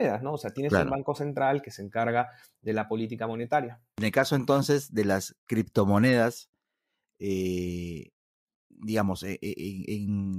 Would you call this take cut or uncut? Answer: uncut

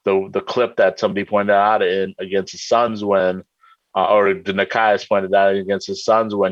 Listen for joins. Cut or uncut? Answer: uncut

